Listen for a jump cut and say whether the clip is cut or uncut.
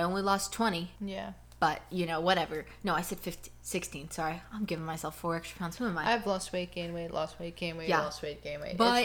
cut